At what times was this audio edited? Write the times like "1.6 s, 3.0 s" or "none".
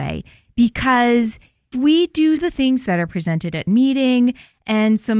1.7 s, 2.4 s, 3.7 s